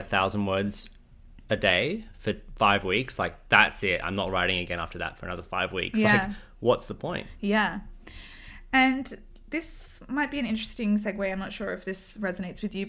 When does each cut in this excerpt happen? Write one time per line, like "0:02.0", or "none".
none